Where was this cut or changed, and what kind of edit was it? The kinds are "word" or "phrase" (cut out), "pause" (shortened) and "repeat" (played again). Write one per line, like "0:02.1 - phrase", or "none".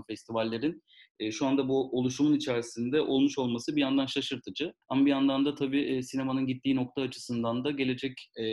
0:04.8 - pause